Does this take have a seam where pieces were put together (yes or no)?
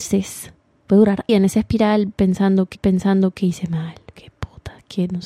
yes